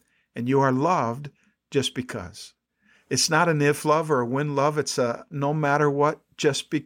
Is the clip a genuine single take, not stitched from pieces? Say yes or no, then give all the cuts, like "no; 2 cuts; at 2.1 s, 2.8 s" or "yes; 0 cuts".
yes; 0 cuts